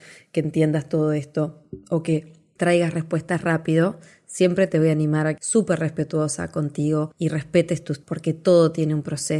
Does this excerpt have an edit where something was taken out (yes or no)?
yes